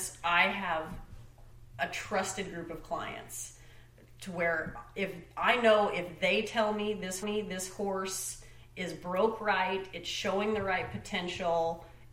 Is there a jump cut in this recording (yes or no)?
yes